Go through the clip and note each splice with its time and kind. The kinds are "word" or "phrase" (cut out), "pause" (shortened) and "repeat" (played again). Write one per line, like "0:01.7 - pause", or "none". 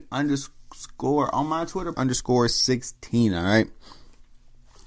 0:01.9 - phrase